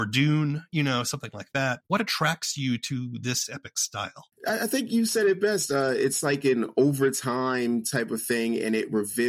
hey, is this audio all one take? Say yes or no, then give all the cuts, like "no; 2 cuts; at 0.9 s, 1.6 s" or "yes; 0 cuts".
no; 1 cut; at 1.8 s